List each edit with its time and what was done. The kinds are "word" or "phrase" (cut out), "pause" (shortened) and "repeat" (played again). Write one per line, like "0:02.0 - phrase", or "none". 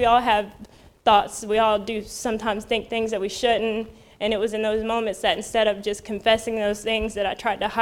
none